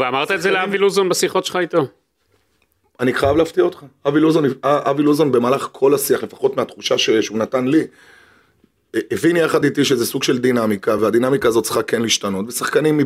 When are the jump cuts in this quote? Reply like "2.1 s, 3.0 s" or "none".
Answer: none